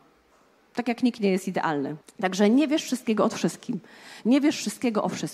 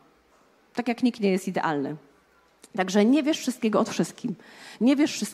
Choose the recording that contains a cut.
first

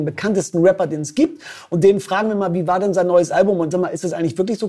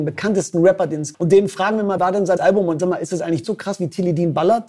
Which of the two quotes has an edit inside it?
second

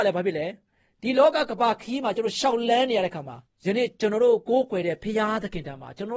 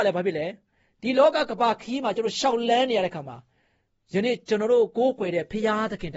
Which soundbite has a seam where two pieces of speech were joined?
first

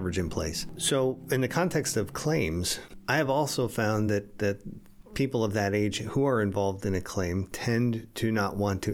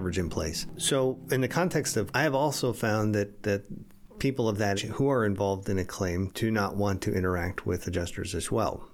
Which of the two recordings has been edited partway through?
second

